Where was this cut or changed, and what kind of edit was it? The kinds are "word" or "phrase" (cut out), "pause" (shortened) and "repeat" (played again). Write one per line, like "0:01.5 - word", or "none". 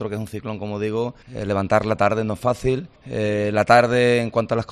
0:01.2 - pause
0:03.0 - pause